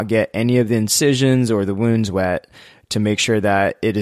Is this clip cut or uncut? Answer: uncut